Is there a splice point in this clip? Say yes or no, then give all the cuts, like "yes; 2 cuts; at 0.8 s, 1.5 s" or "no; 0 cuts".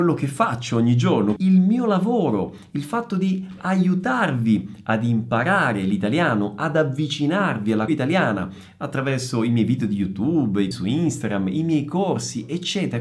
yes; 3 cuts; at 1.4 s, 7.9 s, 10.7 s